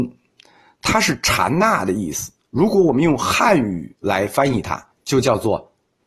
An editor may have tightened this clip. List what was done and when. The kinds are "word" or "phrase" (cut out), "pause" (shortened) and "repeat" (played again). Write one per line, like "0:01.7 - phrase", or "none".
0:04.0 - pause
0:04.9 - pause